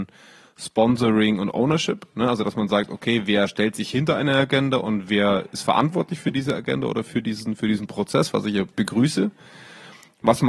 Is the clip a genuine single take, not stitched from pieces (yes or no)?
yes